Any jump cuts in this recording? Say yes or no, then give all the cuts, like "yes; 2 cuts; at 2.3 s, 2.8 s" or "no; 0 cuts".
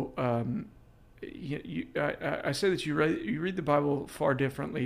no; 0 cuts